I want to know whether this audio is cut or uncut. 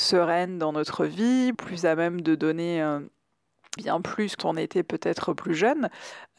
cut